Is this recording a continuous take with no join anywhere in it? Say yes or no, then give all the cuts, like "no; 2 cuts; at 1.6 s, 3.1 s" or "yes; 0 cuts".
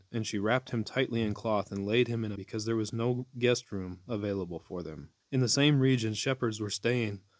no; 2 cuts; at 2.4 s, 5.2 s